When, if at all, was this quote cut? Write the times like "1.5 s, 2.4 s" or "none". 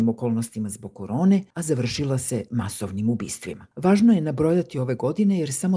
1.5 s, 3.7 s